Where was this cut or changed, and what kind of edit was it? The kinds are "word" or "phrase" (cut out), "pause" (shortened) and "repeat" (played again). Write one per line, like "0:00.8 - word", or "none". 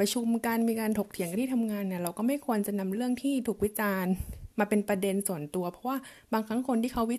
0:04.5 - pause